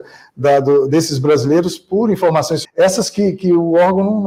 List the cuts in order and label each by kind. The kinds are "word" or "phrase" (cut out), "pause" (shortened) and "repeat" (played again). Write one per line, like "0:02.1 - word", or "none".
0:02.6 - phrase